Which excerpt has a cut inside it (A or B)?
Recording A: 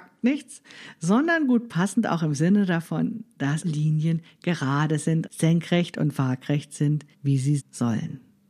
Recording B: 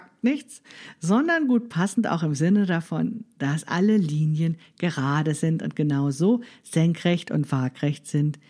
A